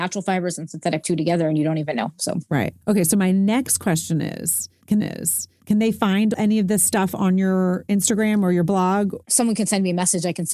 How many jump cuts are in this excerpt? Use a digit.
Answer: 3